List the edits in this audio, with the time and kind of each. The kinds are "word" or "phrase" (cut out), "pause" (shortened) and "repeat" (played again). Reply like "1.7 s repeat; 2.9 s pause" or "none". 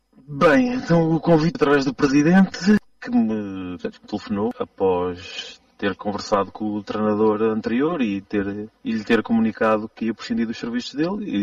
1.5 s word; 4.0 s word